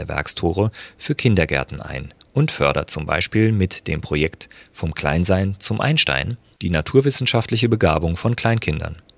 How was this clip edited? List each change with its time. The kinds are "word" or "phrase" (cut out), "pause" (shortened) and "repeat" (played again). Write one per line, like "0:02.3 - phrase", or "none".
none